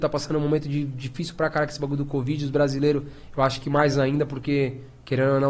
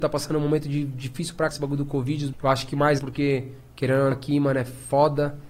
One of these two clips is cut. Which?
second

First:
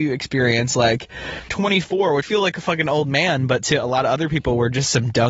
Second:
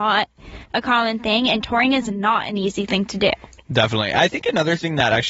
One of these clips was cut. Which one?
first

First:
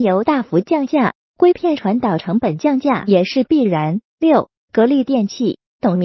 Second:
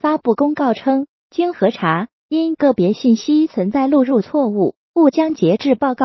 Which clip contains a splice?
first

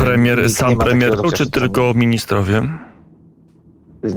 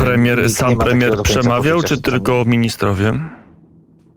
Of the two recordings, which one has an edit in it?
first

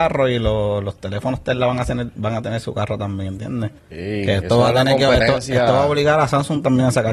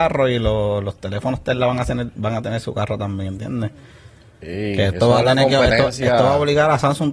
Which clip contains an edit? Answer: first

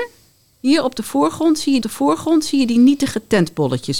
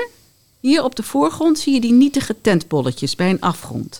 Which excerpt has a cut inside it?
first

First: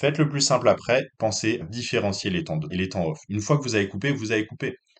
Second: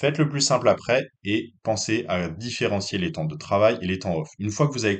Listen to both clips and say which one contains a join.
first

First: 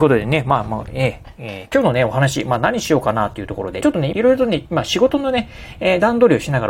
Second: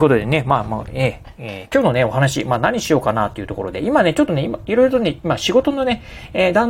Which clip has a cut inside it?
first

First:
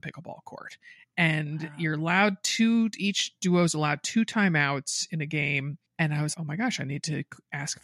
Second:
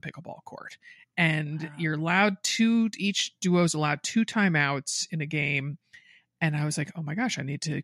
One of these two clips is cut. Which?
first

